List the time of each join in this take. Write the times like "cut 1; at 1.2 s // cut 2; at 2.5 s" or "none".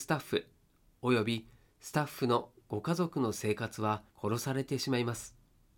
cut 1; at 4.1 s